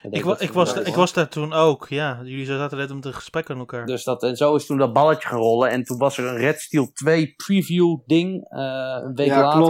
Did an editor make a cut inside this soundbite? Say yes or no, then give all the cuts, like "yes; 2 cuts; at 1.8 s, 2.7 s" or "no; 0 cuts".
no; 0 cuts